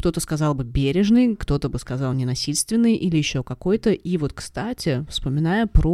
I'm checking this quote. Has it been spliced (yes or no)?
no